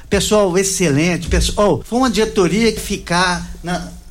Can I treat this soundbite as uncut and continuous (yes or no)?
no